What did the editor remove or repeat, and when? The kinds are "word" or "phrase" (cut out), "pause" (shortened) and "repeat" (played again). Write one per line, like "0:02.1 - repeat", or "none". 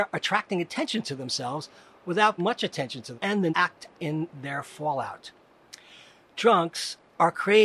0:02.4 - word
0:03.1 - word
0:03.5 - word
0:03.9 - word